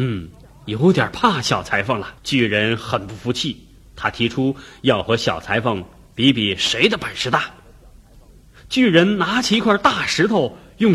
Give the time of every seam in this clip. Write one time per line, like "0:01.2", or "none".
0:02.2